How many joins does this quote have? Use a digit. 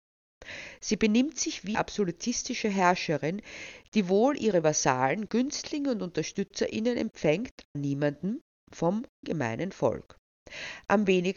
3